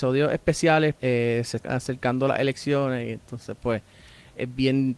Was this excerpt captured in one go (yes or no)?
no